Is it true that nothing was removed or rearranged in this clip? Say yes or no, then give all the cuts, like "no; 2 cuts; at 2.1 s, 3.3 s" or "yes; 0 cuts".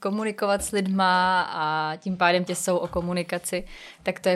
no; 1 cut; at 2.5 s